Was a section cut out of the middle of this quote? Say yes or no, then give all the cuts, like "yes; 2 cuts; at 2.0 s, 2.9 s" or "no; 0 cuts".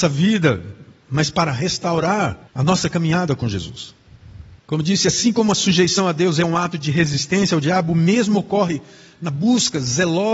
yes; 2 cuts; at 2.5 s, 4.6 s